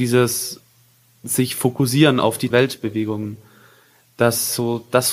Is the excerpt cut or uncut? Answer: cut